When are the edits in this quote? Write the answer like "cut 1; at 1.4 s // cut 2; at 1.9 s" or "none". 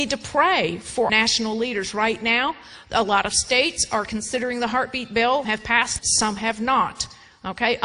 cut 1; at 1.1 s // cut 2; at 5.4 s // cut 3; at 6.0 s